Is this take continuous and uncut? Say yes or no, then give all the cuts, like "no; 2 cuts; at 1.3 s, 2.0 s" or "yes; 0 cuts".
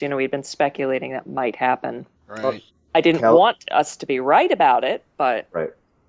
no; 2 cuts; at 2.1 s, 2.7 s